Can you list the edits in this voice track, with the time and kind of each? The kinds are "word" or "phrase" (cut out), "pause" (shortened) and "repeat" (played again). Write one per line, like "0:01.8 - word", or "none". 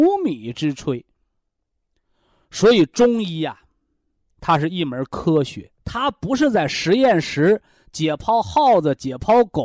0:05.8 - pause